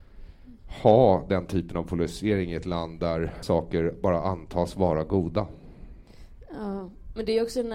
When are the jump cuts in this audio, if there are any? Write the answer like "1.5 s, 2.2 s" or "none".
3.4 s